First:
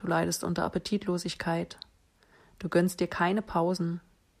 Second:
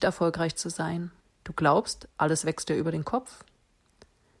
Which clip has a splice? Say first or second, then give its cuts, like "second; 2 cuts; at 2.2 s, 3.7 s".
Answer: second; 1 cut; at 1.2 s